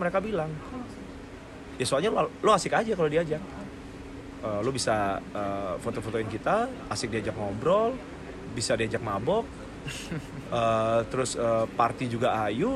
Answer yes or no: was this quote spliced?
yes